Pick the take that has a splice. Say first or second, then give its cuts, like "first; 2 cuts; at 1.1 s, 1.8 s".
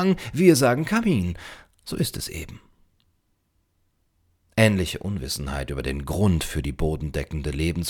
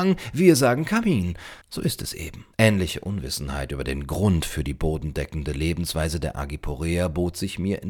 second; 2 cuts; at 1.6 s, 2.5 s